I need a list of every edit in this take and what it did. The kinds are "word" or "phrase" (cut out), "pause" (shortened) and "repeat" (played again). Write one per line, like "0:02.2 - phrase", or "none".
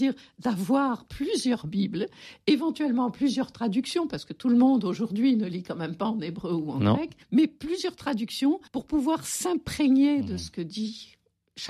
0:07.2 - pause
0:08.7 - pause